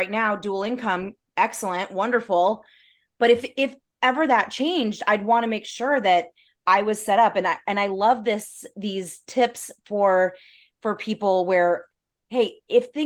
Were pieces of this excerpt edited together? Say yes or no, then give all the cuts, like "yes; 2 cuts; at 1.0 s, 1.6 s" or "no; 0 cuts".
no; 0 cuts